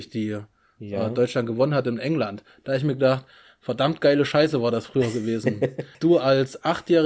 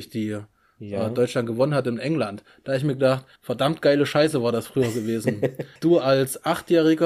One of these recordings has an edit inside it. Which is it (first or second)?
second